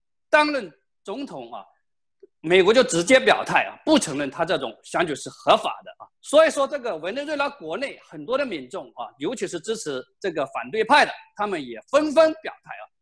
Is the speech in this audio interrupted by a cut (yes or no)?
yes